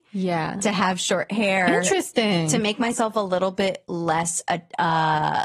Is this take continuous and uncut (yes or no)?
yes